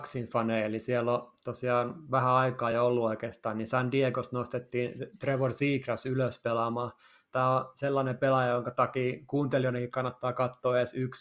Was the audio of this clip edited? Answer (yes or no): no